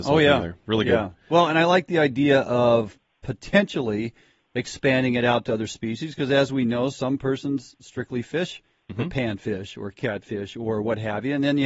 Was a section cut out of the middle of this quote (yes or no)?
no